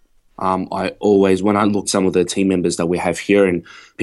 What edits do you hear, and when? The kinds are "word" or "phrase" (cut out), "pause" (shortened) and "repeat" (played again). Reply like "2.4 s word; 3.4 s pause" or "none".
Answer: 1.8 s phrase

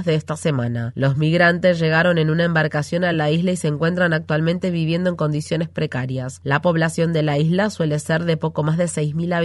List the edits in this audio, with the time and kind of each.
none

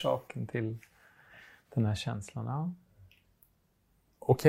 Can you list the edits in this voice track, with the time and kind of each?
none

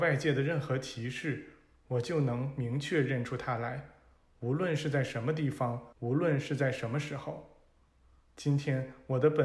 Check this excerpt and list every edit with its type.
5.9 s pause

